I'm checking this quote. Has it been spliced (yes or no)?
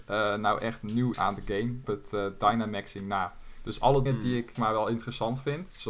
yes